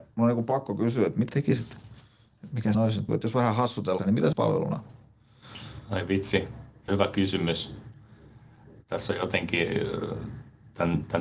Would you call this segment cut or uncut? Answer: cut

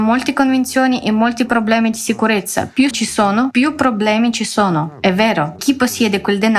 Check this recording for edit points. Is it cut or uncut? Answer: cut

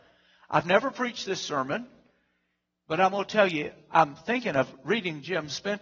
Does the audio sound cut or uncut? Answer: uncut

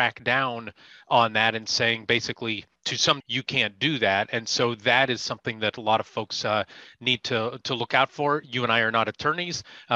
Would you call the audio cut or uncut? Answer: cut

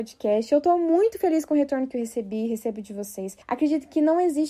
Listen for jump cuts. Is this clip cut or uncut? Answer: cut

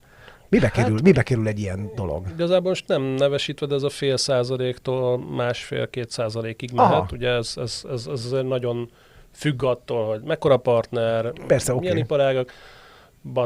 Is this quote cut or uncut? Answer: uncut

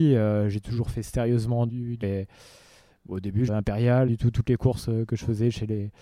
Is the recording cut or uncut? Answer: cut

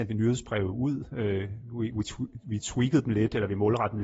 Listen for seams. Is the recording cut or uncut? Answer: uncut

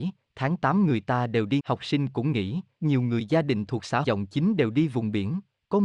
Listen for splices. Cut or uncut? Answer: cut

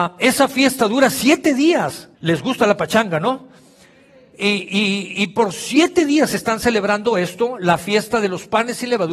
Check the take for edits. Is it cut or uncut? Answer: cut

